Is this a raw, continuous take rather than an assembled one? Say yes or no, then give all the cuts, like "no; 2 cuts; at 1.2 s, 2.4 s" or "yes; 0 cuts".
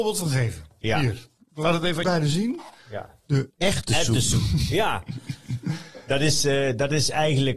no; 2 cuts; at 2.0 s, 3.5 s